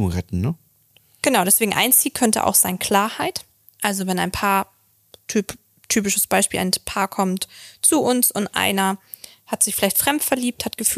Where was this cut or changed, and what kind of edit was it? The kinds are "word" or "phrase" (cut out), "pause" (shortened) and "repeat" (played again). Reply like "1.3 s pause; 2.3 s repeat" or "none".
none